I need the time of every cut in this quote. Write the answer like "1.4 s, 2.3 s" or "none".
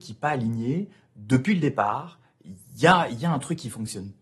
none